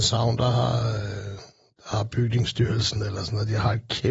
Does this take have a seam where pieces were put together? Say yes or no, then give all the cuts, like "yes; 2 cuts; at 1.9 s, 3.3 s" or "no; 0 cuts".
no; 0 cuts